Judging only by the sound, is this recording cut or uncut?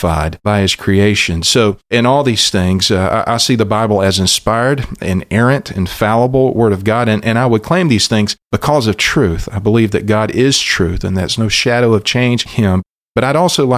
cut